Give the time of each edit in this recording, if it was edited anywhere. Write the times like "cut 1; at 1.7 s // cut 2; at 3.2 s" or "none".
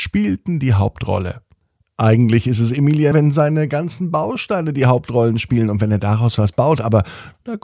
cut 1; at 3.1 s